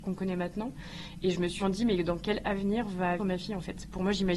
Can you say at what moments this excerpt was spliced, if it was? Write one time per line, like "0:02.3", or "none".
0:01.6
0:03.2

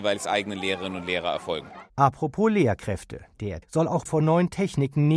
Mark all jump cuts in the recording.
0:03.6
0:04.1

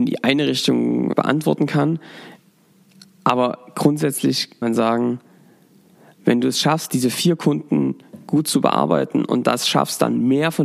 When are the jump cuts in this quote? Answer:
0:01.1
0:04.6

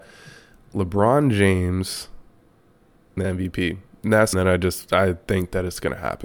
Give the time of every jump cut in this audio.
0:03.2
0:04.3

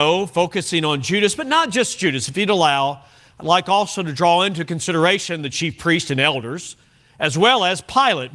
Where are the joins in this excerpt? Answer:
none

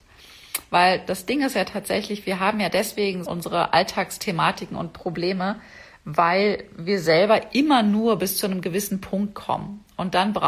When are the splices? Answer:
0:03.2

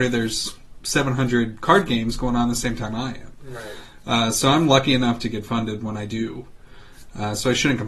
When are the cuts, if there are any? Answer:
none

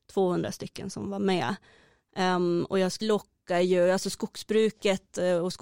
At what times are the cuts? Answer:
0:03.0

